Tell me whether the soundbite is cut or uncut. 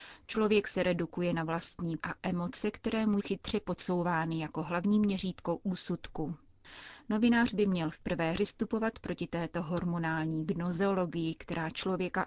cut